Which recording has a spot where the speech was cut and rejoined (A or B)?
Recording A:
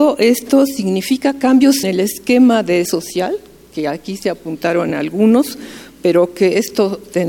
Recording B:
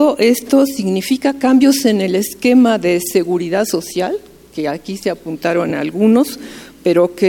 A